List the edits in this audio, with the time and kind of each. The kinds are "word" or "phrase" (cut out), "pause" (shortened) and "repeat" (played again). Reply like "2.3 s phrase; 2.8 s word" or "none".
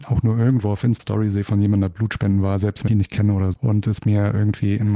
1.0 s word; 2.9 s word; 3.5 s word